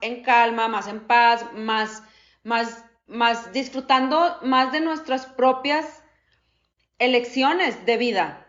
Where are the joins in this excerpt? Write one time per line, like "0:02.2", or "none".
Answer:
none